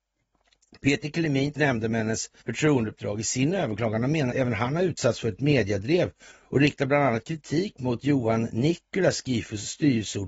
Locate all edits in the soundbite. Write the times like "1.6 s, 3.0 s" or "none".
1.5 s, 2.4 s, 4.3 s